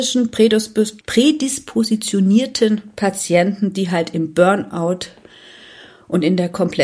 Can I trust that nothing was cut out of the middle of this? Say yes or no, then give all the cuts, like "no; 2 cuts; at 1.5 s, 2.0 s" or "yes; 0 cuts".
no; 1 cut; at 1.0 s